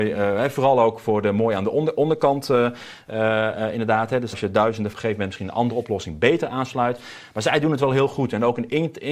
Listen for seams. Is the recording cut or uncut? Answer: cut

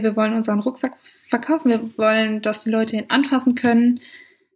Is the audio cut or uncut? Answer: uncut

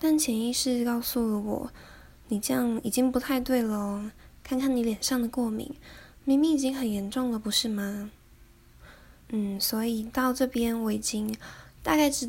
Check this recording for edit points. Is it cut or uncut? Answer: uncut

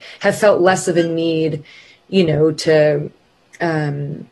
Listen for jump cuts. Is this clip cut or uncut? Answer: uncut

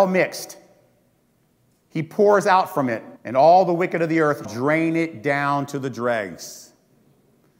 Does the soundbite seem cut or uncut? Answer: cut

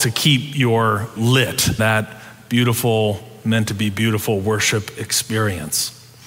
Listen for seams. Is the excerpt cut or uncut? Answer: cut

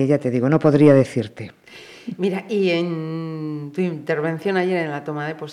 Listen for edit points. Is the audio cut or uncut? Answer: uncut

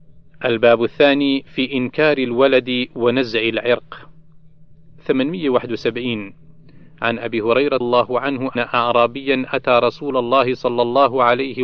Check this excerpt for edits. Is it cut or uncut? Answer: cut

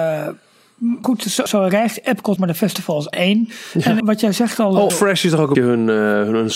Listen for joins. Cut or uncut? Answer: cut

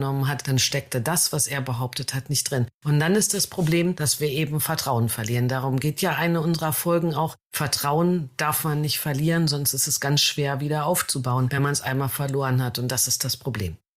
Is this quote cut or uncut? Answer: uncut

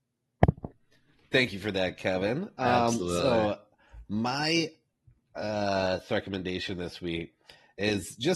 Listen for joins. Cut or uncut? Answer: uncut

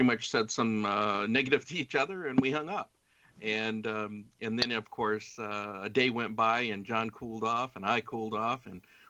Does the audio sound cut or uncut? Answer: cut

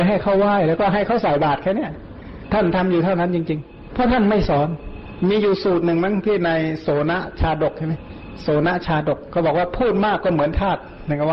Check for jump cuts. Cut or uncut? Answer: cut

